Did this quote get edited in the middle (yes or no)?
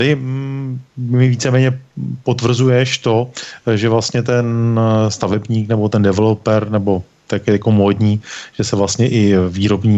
no